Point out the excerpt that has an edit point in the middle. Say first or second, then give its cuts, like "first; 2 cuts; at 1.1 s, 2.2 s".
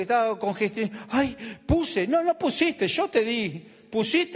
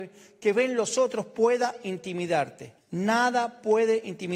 second; 1 cut; at 2.8 s